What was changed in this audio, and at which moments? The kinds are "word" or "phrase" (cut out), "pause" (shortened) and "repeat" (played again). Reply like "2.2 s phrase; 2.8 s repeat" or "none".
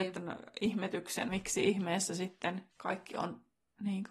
1.3 s word; 2.7 s pause

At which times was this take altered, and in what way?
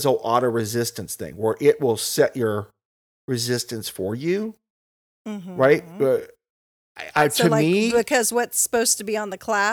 none

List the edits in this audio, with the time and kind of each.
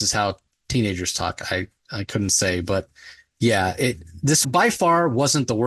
4.4 s word

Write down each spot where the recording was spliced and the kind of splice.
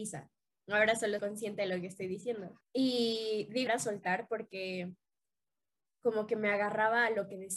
1.2 s word; 2.6 s pause; 3.7 s word

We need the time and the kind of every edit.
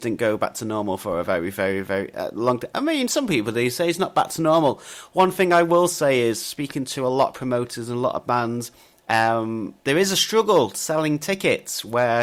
9.8 s pause

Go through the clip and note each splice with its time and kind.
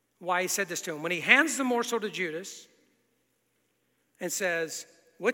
none

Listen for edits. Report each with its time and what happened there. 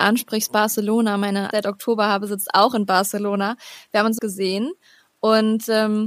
1.5 s phrase; 4.2 s phrase

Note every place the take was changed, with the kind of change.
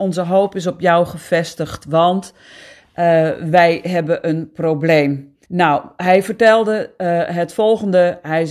5.4 s pause

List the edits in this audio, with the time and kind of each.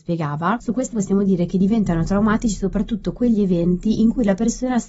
0.9 s word

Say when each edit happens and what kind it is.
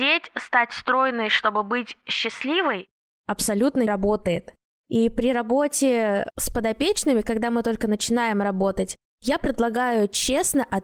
3.9 s word

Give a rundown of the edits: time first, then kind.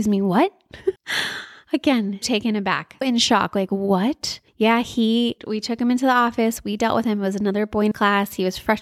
1.0 s pause; 2.2 s word; 3.0 s word; 4.5 s pause; 5.4 s word; 7.9 s word

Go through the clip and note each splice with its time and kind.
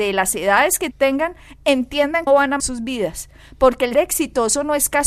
0.9 s word; 2.3 s word; 2.6 s word; 3.9 s word

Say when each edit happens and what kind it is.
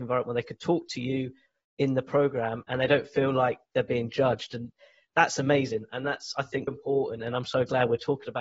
6.7 s word

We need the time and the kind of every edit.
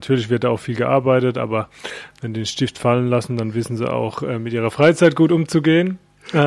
none

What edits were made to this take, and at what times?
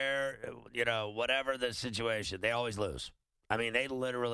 none

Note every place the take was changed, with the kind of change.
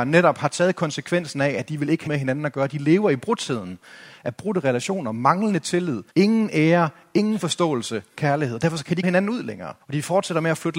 2.1 s word; 6.1 s pause; 8.2 s word; 9.0 s word; 9.8 s pause

